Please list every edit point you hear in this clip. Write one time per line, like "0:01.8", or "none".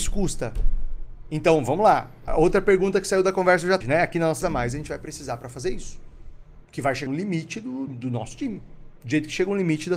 0:02.3
0:03.8
0:04.4
0:06.6
0:07.1
0:07.9